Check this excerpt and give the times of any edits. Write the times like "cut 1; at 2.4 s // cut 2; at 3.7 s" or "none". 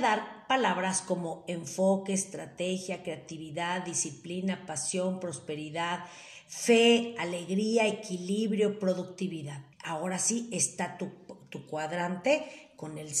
cut 1; at 9.7 s